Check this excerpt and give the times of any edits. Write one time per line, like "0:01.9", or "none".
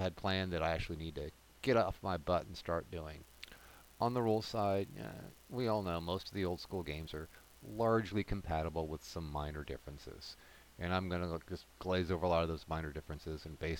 none

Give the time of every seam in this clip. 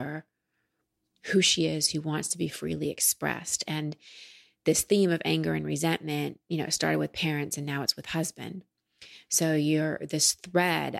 none

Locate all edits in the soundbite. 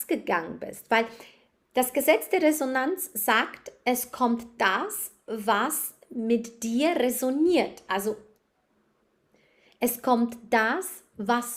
none

